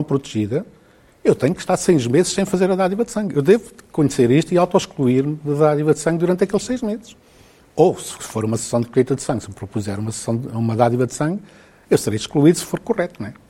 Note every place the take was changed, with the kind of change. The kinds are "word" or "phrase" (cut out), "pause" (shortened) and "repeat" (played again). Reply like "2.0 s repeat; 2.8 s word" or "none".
none